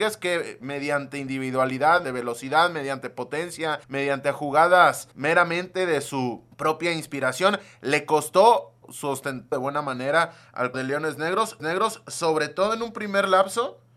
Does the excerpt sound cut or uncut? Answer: cut